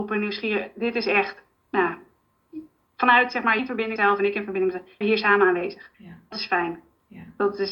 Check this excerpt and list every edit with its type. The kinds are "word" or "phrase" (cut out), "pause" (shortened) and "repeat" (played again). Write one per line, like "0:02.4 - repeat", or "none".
0:01.5 - pause
0:03.6 - word
0:04.0 - word
0:05.0 - word
0:05.9 - pause
0:06.3 - word

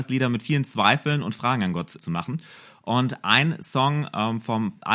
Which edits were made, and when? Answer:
0:02.0 - word

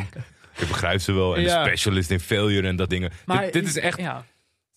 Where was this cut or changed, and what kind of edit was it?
0:02.9 - word

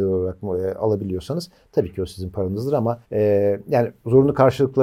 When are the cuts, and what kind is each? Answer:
0:03.0 - pause

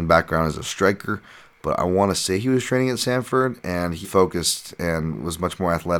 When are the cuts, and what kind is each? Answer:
0:04.0 - word

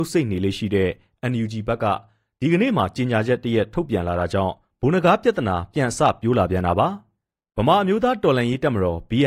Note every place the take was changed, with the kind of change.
none

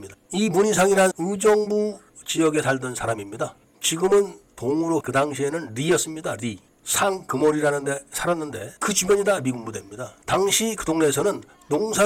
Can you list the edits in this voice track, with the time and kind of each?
0:01.1 - word
0:05.0 - word
0:08.8 - pause
0:10.2 - pause

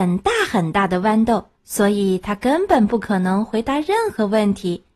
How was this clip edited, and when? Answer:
0:01.5 - pause

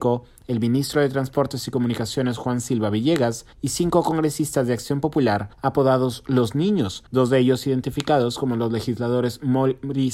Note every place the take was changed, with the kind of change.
0:03.5 - pause
0:05.5 - pause
0:07.1 - pause

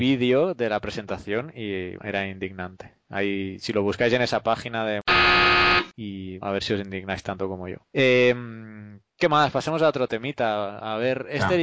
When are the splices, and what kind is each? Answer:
0:02.0 - word
0:06.4 - word

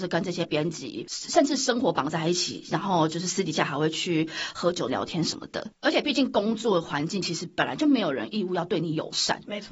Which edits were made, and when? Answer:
0:04.9 - phrase

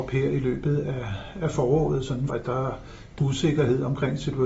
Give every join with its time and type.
0:02.3 - phrase
0:03.2 - phrase

